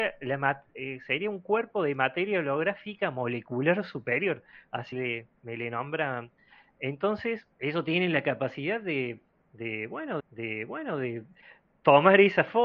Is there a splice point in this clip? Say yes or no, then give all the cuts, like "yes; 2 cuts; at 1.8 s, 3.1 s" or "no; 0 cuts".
yes; 4 cuts; at 4.9 s, 5.4 s, 7.5 s, 10.2 s